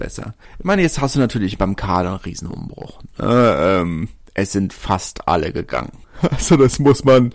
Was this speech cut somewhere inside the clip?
no; 0 cuts

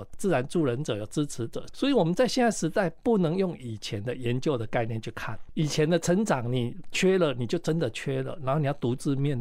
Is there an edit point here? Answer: no; 0 cuts

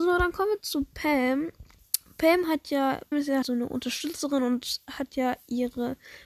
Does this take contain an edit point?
yes; 2 cuts; at 3.1 s, 3.4 s

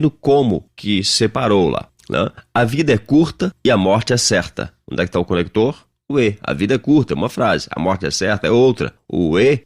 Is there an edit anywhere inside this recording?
no; 0 cuts

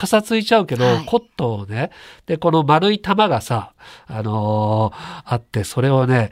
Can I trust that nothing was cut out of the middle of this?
yes; 0 cuts

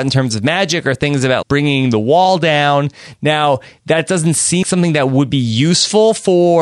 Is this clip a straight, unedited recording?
no; 2 cuts; at 1.4 s, 4.6 s

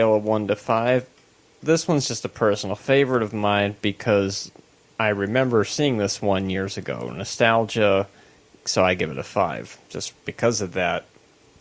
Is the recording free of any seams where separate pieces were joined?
yes; 0 cuts

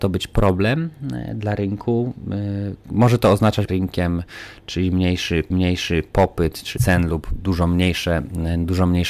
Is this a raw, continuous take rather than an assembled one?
no; 3 cuts; at 3.7 s, 5.5 s, 6.8 s

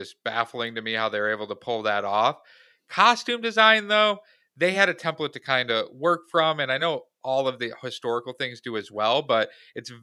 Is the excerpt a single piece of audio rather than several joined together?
yes; 0 cuts

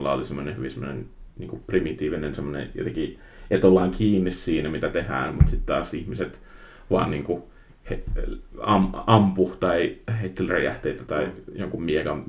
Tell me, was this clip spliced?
yes; 1 cut; at 11.1 s

